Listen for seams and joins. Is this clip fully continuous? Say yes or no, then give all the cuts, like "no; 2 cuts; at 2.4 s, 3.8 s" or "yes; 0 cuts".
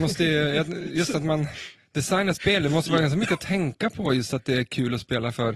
yes; 0 cuts